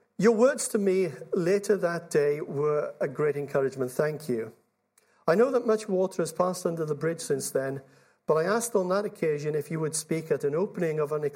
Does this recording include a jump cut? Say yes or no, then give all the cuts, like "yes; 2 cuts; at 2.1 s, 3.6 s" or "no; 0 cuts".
no; 0 cuts